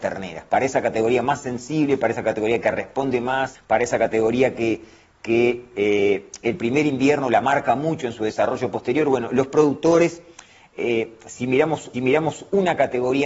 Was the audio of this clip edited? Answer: yes; 1 cut; at 11.9 s

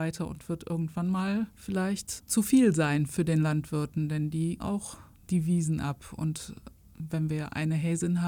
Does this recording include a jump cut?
yes; 2 cuts; at 2.2 s, 4.6 s

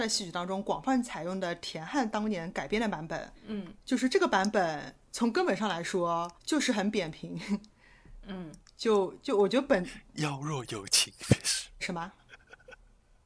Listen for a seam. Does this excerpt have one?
yes; 4 cuts; at 3.3 s, 6.4 s, 7.7 s, 11.8 s

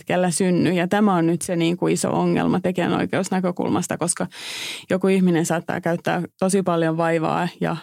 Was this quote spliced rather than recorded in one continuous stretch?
yes; 1 cut; at 6.3 s

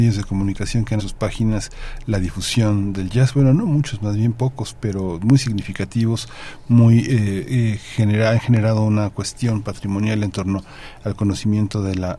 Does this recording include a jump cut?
yes; 1 cut; at 1.0 s

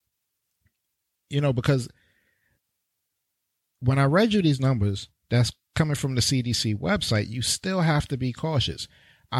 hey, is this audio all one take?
yes; 0 cuts

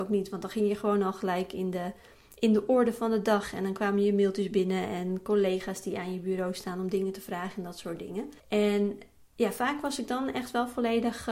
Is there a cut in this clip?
yes; 1 cut; at 8.4 s

